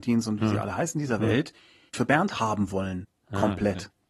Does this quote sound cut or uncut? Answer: cut